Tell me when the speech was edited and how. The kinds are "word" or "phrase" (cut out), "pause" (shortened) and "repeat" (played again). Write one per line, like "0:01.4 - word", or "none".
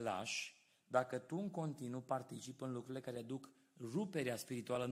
none